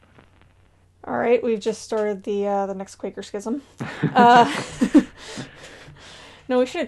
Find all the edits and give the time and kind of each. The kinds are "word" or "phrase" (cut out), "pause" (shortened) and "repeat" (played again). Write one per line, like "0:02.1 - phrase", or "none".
0:03.7 - pause